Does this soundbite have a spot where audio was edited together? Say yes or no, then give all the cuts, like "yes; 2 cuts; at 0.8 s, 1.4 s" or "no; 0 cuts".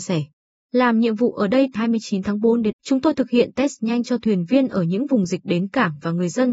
yes; 2 cuts; at 1.8 s, 2.7 s